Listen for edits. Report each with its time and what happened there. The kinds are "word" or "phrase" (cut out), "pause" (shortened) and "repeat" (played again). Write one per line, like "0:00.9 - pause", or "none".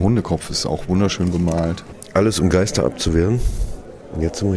none